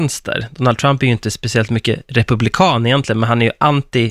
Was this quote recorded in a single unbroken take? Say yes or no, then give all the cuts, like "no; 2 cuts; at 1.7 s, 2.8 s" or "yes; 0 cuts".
yes; 0 cuts